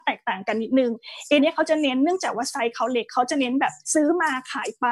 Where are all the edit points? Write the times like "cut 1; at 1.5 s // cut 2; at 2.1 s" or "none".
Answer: cut 1; at 1.4 s // cut 2; at 3.8 s